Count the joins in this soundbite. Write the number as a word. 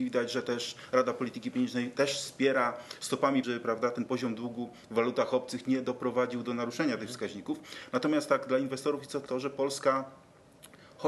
two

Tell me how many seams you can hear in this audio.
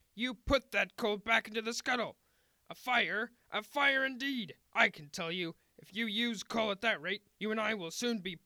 three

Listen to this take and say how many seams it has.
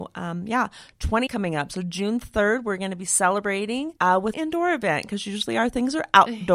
three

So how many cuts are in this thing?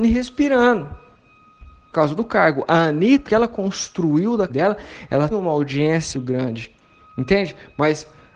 five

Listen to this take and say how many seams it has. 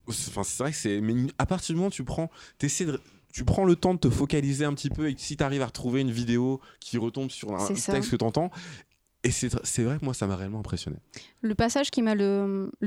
zero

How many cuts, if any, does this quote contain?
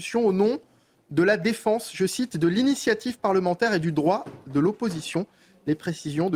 zero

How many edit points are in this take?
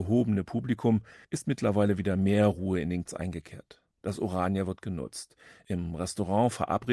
three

